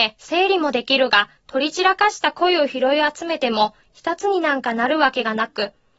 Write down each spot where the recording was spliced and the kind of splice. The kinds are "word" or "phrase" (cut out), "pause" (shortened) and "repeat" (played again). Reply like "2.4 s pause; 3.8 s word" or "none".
1.4 s pause